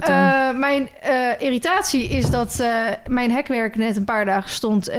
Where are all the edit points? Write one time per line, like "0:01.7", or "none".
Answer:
none